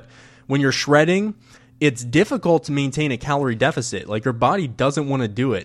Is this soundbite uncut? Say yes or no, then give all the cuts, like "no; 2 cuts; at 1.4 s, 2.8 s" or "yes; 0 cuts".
yes; 0 cuts